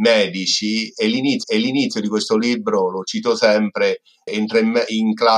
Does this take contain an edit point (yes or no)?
yes